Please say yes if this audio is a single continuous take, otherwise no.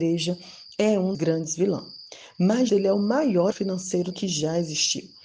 no